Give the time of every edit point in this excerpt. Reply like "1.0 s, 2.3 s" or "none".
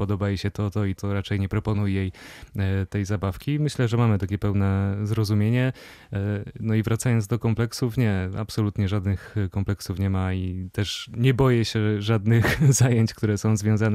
1.0 s